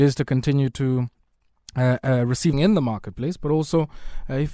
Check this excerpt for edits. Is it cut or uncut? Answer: cut